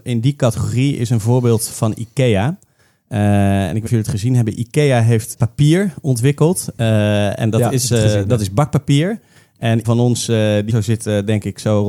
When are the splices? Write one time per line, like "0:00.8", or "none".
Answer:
0:01.7
0:03.9
0:05.3
0:09.8
0:10.7